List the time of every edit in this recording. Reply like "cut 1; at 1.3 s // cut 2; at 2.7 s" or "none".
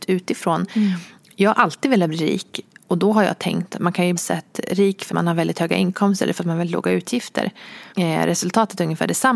cut 1; at 4.2 s // cut 2; at 5.1 s // cut 3; at 7.9 s